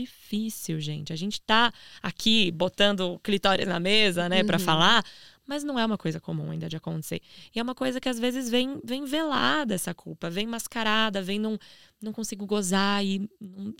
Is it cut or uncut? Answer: uncut